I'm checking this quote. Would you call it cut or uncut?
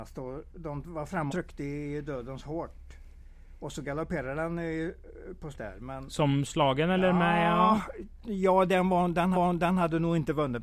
cut